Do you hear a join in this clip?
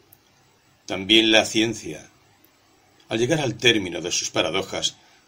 no; 0 cuts

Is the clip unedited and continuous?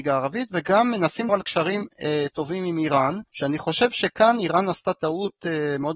no; 2 cuts; at 1.3 s, 3.3 s

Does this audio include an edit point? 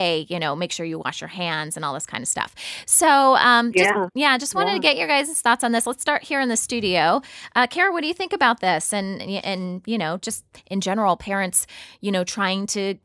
no; 0 cuts

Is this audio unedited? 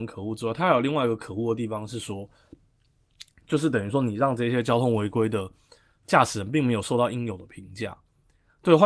yes; 0 cuts

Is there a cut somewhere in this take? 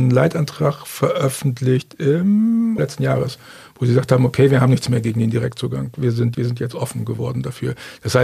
yes; 2 cuts; at 2.8 s, 6.3 s

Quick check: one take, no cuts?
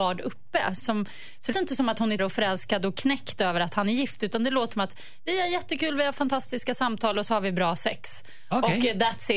no; 3 cuts; at 1.5 s, 2.2 s, 4.7 s

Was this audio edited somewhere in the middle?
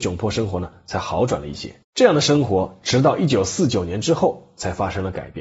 yes; 1 cut; at 1.8 s

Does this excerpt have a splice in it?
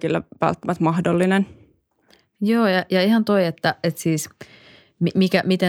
no; 0 cuts

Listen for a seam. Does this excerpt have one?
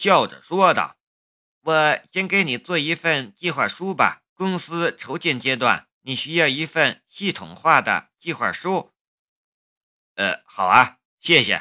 yes; 3 cuts; at 1.3 s, 4.3 s, 5.9 s

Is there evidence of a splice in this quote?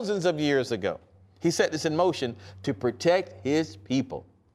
no; 0 cuts

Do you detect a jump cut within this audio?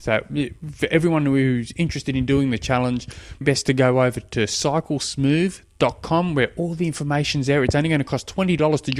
yes; 1 cut; at 3.4 s

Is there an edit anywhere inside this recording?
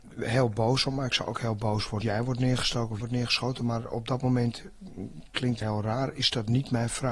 yes; 3 cuts; at 2.0 s, 3.0 s, 5.6 s

